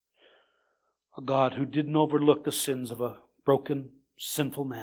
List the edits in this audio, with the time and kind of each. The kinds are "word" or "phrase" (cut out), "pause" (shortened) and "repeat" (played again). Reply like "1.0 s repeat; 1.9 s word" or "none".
none